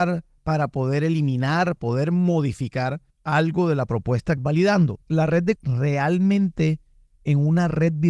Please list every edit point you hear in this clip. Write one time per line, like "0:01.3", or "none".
0:01.8
0:04.4
0:05.0
0:05.6

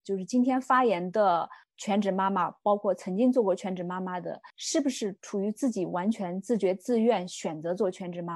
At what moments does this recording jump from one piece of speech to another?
0:04.5

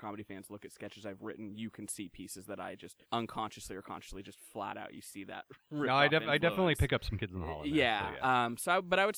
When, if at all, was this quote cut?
0:03.0

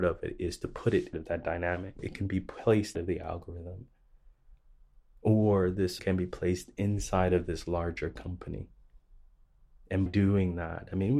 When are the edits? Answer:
0:01.1
0:02.0
0:02.9
0:06.0
0:10.1

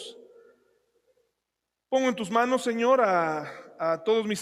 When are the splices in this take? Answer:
none

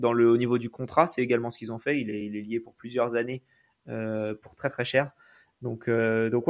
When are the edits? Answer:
none

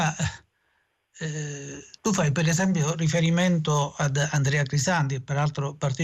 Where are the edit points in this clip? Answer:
0:02.0

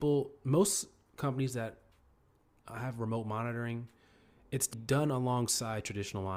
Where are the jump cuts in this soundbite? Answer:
0:04.7

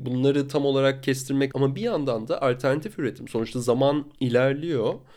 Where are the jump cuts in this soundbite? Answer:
0:01.5
0:04.2

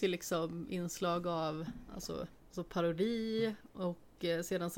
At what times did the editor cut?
none

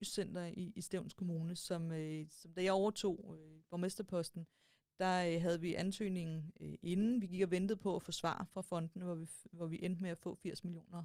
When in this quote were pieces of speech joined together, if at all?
none

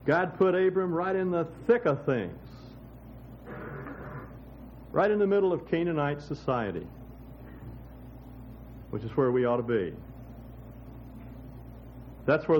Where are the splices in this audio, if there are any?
none

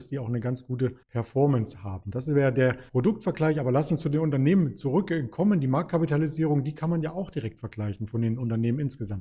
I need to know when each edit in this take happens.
0:01.0
0:02.9

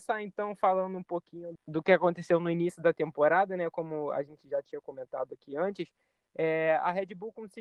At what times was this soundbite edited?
0:01.6

